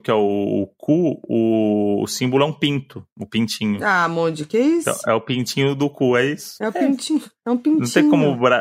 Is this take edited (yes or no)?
no